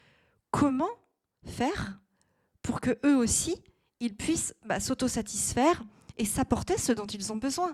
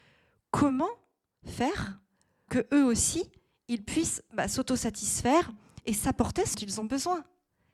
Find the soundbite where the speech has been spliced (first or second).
second